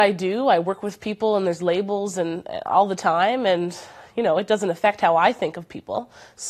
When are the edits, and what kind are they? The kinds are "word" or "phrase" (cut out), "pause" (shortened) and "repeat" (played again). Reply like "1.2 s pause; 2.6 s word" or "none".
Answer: none